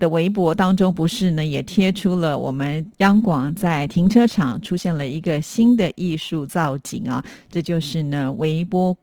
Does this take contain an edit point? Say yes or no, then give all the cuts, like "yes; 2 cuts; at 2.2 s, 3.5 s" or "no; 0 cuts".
yes; 1 cut; at 2.9 s